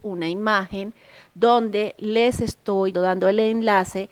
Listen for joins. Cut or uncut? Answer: cut